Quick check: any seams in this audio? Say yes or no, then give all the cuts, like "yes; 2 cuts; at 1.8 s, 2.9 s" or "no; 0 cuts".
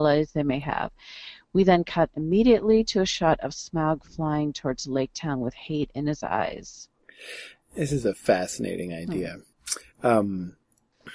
no; 0 cuts